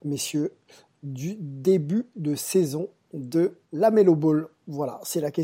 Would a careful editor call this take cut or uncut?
cut